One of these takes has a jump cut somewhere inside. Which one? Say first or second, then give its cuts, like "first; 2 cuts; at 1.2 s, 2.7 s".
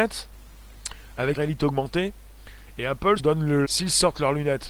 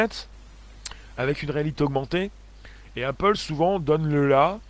first; 3 cuts; at 1.4 s, 3.2 s, 3.6 s